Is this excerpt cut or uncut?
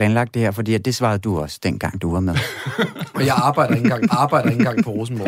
cut